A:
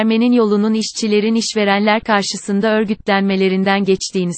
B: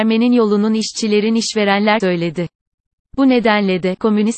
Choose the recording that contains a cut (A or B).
B